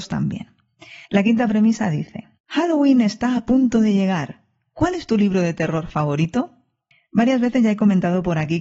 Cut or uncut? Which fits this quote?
cut